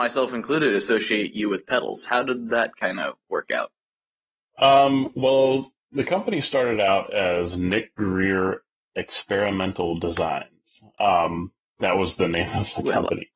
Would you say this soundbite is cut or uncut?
uncut